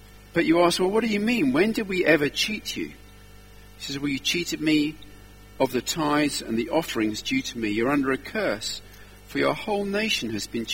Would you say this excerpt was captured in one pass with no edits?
yes; 0 cuts

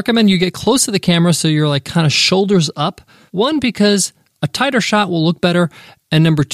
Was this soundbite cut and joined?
no; 0 cuts

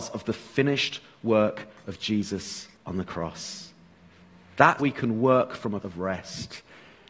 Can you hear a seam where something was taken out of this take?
yes; 3 cuts; at 2.7 s, 4.8 s, 5.8 s

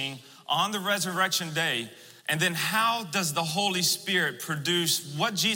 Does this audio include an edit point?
yes; 1 cut; at 2.2 s

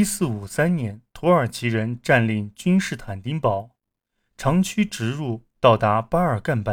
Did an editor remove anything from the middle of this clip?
yes; 2 cuts; at 1.1 s, 5.5 s

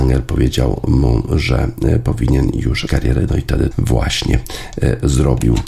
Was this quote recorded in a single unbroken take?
no; 2 cuts; at 2.9 s, 3.7 s

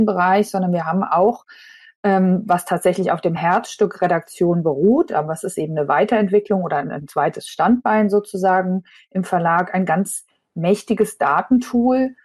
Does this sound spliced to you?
no; 0 cuts

